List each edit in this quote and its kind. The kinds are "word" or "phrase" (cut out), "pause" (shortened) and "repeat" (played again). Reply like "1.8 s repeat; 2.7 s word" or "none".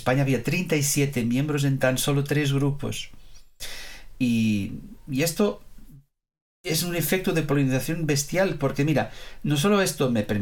none